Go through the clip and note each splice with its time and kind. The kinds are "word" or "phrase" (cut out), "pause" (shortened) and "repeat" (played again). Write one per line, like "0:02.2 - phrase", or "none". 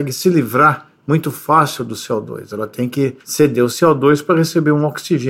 0:03.2 - pause